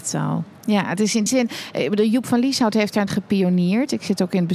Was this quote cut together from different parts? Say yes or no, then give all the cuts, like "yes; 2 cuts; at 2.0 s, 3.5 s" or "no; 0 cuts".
yes; 2 cuts; at 1.3 s, 3.1 s